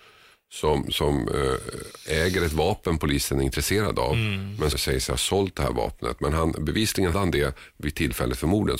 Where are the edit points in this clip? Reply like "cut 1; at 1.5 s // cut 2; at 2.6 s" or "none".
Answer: cut 1; at 4.7 s // cut 2; at 7.1 s